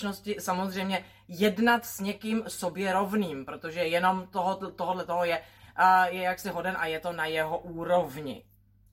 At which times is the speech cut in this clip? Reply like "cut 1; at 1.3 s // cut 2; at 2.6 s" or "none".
none